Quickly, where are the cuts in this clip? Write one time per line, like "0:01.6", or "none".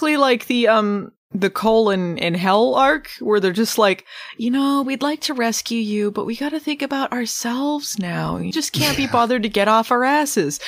0:01.2
0:08.5